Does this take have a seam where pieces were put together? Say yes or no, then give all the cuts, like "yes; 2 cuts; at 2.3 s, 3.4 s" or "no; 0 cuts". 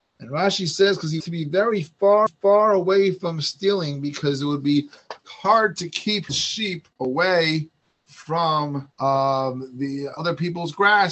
yes; 7 cuts; at 1.2 s, 2.3 s, 5.2 s, 6.3 s, 6.9 s, 8.9 s, 10.2 s